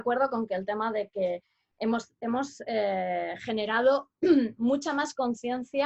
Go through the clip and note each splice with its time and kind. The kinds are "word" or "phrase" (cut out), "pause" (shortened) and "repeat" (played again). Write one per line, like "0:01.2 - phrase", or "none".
none